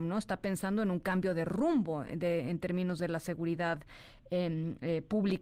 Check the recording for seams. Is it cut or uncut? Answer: uncut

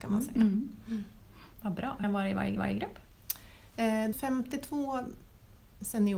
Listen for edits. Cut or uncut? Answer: cut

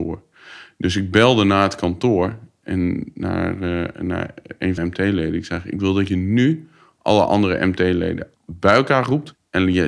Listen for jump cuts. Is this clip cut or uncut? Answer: cut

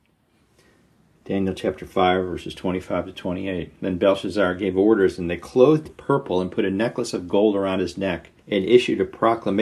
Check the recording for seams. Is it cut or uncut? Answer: cut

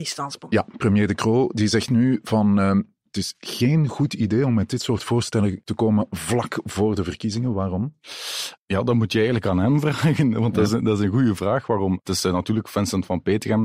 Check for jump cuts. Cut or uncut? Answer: uncut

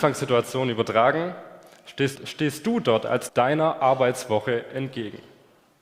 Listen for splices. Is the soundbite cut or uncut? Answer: cut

